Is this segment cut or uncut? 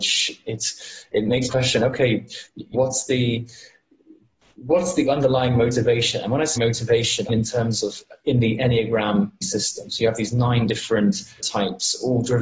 cut